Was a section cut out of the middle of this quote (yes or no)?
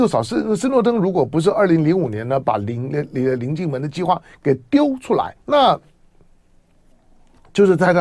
yes